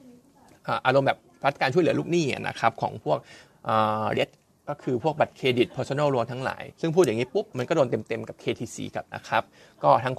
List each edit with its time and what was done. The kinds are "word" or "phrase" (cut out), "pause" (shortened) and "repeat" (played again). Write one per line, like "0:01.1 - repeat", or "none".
0:04.1 - word
0:06.7 - pause
0:09.1 - word